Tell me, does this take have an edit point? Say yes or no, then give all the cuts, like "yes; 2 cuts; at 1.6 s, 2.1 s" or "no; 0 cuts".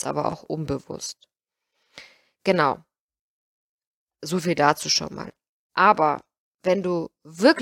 no; 0 cuts